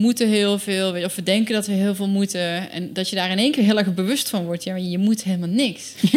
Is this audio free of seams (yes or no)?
yes